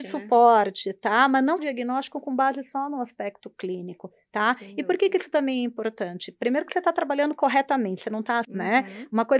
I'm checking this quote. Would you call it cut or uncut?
cut